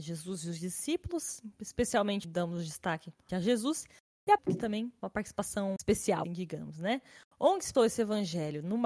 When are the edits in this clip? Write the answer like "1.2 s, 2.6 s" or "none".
2.2 s, 3.3 s, 4.4 s, 5.0 s, 5.8 s, 6.2 s, 7.7 s